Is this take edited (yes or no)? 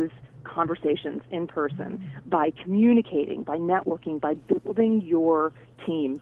no